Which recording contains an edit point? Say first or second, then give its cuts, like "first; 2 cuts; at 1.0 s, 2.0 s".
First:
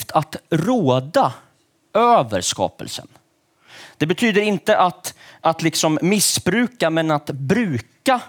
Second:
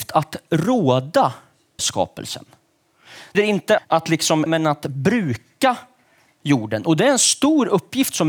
second; 4 cuts; at 1.8 s, 3.3 s, 3.8 s, 4.5 s